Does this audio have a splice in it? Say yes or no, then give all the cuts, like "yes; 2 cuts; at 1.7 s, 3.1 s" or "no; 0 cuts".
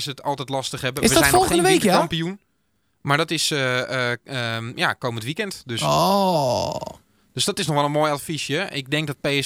no; 0 cuts